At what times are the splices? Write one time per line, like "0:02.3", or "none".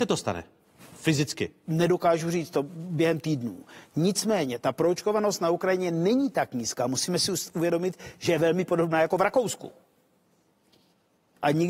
none